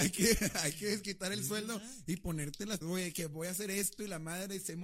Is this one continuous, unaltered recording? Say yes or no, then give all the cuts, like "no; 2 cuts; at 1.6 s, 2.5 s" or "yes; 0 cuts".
no; 1 cut; at 2.8 s